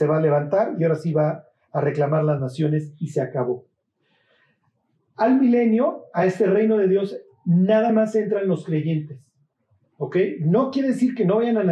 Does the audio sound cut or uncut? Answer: uncut